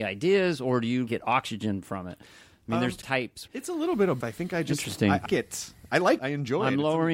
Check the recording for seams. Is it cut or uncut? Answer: cut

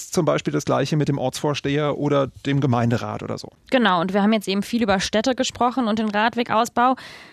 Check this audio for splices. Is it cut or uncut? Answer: uncut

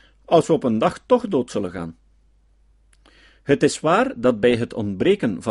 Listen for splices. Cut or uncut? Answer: uncut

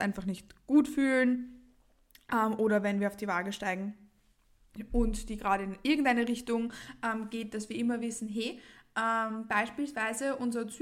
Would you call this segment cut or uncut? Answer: uncut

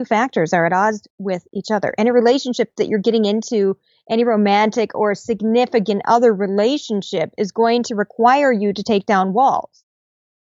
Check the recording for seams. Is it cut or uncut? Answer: uncut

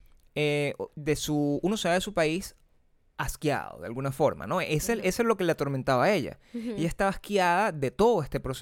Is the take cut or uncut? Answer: uncut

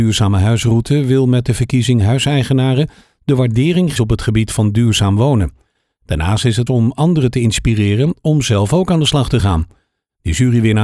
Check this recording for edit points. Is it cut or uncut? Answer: cut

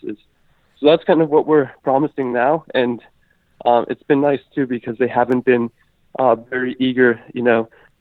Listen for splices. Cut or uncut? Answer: uncut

